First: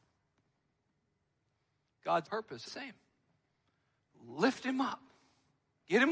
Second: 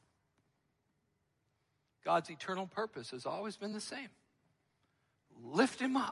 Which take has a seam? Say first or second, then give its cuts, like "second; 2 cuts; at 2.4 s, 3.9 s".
first; 2 cuts; at 2.2 s, 2.7 s